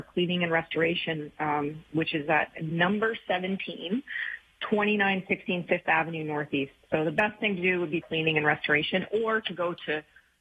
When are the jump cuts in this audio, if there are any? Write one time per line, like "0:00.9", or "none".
0:08.0